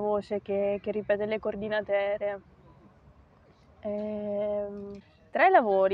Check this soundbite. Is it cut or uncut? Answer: uncut